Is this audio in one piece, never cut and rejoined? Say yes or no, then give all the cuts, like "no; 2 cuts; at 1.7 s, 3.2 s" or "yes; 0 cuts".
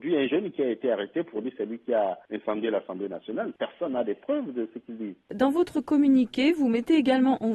yes; 0 cuts